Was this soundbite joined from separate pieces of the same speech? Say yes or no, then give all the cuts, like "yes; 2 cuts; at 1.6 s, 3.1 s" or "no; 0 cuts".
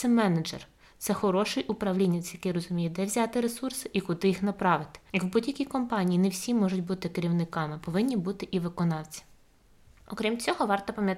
no; 0 cuts